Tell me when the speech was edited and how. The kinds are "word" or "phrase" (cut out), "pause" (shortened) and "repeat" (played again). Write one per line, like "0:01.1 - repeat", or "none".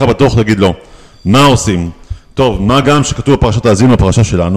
none